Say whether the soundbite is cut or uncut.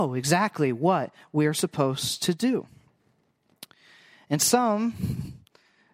uncut